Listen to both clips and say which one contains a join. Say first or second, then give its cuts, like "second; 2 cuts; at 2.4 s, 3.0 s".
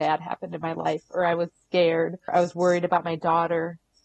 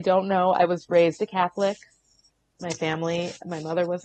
first; 1 cut; at 2.3 s